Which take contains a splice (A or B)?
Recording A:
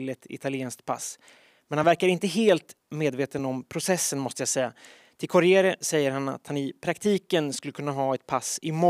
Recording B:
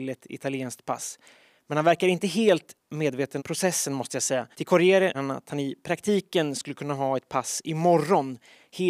B